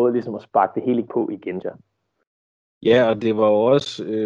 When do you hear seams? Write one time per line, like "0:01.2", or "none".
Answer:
0:01.1
0:01.6